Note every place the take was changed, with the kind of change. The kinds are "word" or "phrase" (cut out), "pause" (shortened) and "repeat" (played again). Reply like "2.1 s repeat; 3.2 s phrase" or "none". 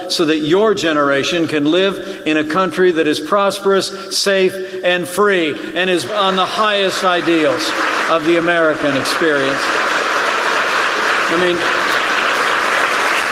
6.1 s word